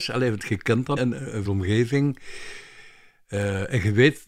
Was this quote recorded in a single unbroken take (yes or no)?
no